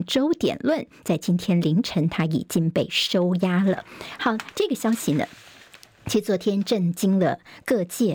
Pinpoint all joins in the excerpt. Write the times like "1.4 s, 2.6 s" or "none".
none